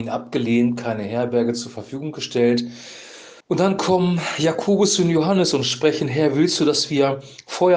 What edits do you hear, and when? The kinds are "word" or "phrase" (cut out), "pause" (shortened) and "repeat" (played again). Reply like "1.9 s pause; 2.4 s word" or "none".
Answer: 3.4 s pause